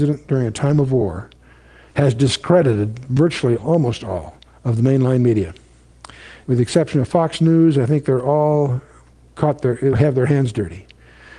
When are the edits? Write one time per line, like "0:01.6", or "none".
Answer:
0:03.6
0:09.9